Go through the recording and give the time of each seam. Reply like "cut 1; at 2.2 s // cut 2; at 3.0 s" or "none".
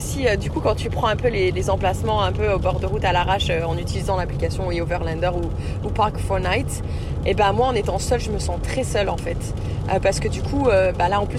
none